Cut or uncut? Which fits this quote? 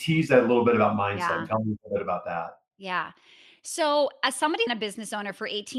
cut